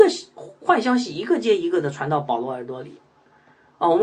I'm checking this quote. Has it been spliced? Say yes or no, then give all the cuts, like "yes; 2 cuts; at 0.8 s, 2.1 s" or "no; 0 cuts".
no; 0 cuts